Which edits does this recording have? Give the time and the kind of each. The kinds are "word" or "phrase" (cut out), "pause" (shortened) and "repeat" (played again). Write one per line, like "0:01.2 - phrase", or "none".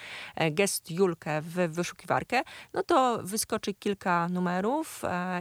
none